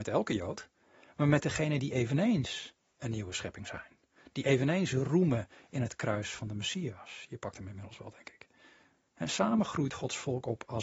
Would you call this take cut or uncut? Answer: uncut